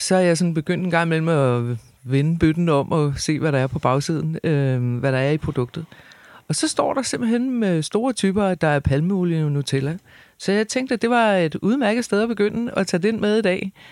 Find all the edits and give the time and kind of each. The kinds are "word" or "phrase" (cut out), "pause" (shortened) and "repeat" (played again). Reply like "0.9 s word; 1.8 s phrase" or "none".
none